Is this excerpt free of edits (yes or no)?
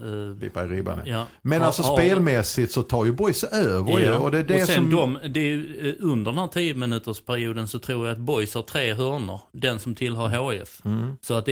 yes